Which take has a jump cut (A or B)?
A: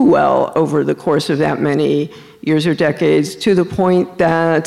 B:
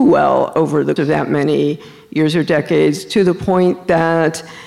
B